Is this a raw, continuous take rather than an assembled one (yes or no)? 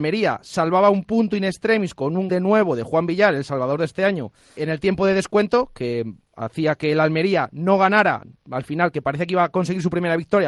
no